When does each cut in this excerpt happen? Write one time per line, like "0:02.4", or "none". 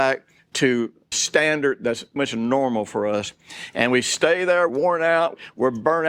0:01.1
0:02.2
0:04.7